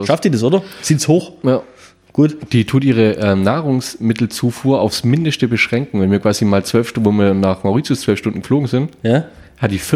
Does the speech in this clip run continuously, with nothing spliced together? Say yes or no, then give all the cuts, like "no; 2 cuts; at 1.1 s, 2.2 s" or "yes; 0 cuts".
yes; 0 cuts